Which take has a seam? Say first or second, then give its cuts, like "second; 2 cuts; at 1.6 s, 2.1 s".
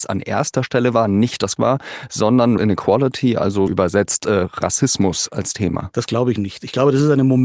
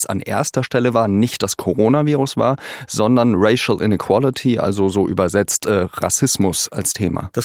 first; 3 cuts; at 1.6 s, 2.6 s, 3.7 s